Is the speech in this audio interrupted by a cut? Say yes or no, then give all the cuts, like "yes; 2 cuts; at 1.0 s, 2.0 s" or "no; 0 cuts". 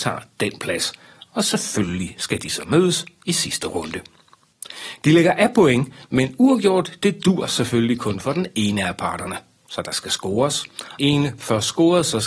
yes; 1 cut; at 11.0 s